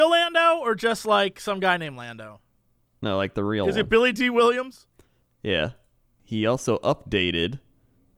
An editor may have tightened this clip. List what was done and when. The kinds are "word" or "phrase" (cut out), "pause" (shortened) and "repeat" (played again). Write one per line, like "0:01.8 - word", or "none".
none

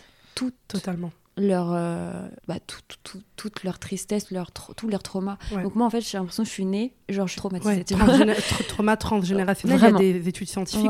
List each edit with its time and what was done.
0:02.4 - pause
0:03.0 - pause
0:04.2 - word
0:07.4 - phrase

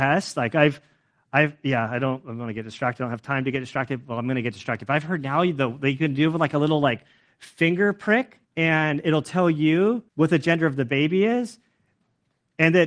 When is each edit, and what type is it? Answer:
0:08.4 - pause
0:10.1 - pause

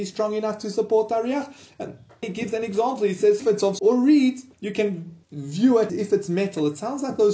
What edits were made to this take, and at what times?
0:02.2 - word
0:03.4 - phrase
0:03.8 - word
0:04.5 - pause
0:05.2 - pause
0:05.9 - word

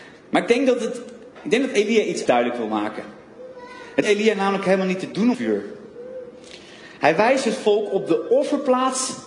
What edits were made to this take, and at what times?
0:01.3 - pause
0:02.3 - word
0:04.0 - word
0:05.3 - word

